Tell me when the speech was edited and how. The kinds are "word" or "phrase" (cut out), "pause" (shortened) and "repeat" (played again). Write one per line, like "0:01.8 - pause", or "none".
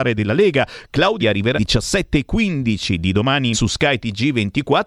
0:01.2 - word
0:01.5 - word
0:03.5 - word